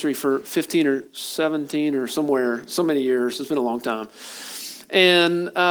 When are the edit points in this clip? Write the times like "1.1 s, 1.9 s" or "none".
1.1 s